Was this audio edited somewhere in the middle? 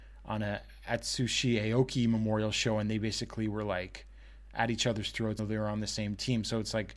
yes; 1 cut; at 5.4 s

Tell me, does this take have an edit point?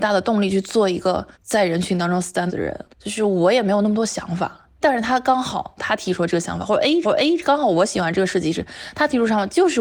yes; 5 cuts; at 1.3 s, 2.5 s, 2.9 s, 4.8 s, 7.0 s

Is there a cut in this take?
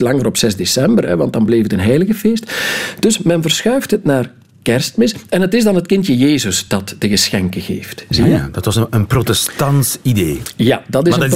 no; 0 cuts

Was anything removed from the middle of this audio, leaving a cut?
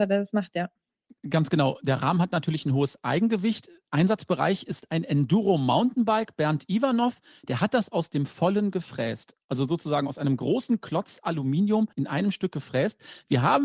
yes; 1 cut; at 11.9 s

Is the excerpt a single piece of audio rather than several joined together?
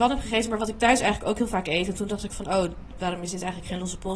yes; 0 cuts

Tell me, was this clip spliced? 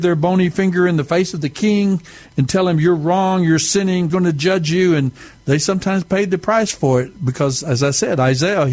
yes; 1 cut; at 4.1 s

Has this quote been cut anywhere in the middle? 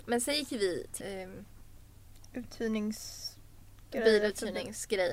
yes; 1 cut; at 1.0 s

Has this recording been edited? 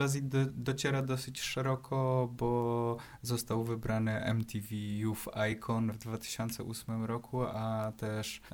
no; 0 cuts

